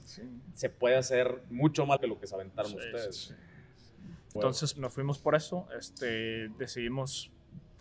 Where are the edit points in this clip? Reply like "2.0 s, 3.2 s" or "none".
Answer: 2.0 s, 4.4 s, 4.8 s